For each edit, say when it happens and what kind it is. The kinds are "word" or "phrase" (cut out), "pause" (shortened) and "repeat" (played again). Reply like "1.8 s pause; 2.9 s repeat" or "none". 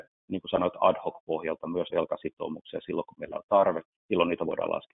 1.9 s word; 4.0 s word